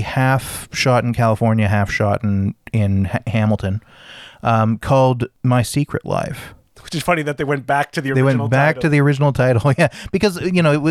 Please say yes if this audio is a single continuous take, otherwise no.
yes